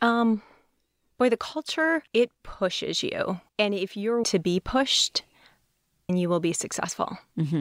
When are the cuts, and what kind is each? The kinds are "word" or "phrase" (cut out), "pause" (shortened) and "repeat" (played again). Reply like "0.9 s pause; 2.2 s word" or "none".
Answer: 2.1 s pause; 3.5 s pause; 4.2 s word; 6.1 s word